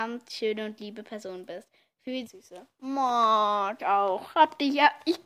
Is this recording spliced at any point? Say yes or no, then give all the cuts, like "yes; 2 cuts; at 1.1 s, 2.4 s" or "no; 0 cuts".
yes; 2 cuts; at 2.2 s, 3.8 s